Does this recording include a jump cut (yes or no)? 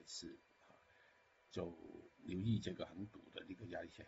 yes